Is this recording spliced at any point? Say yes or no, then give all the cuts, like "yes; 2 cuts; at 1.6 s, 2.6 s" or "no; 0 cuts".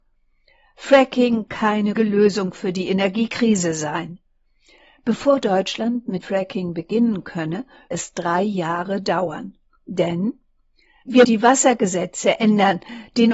yes; 5 cuts; at 1.5 s, 2.0 s, 6.2 s, 7.9 s, 11.2 s